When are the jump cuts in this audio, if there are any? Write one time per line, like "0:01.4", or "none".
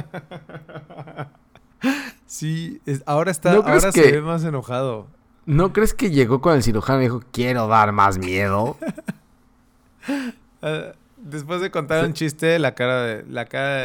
none